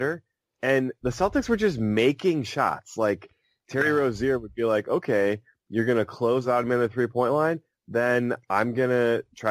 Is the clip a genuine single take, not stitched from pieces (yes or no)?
yes